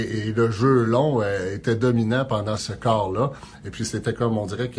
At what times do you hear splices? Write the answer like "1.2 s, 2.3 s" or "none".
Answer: 2.6 s